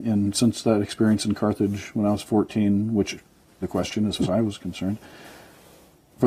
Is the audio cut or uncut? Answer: cut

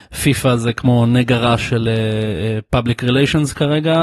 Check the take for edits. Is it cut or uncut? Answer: uncut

